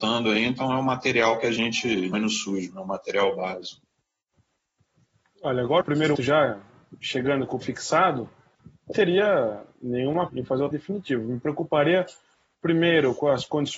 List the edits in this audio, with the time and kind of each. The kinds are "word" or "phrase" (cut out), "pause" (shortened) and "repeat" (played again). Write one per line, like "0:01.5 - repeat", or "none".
0:02.1 - word
0:02.7 - word
0:05.8 - word
0:06.1 - word
0:07.6 - word
0:08.9 - word
0:10.3 - word
0:10.7 - word

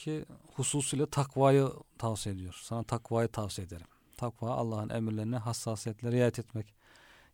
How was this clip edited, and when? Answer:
0:01.9 - pause

